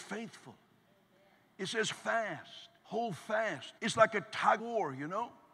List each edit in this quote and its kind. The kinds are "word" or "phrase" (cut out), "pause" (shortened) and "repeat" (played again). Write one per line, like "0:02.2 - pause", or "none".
0:01.9 - word
0:02.8 - pause
0:03.8 - pause
0:04.6 - word